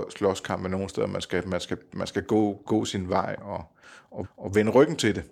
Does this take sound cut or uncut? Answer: cut